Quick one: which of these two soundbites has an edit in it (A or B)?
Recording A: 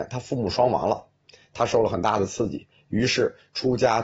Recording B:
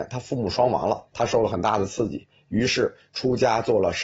B